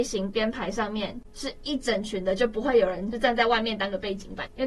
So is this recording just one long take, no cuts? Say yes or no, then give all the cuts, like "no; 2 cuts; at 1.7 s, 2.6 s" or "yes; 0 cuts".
yes; 0 cuts